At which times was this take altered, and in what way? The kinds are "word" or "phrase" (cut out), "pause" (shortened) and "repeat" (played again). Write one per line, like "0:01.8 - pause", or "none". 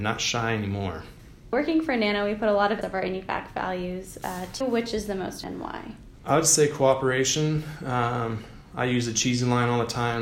0:02.8 - phrase
0:04.6 - word
0:05.4 - word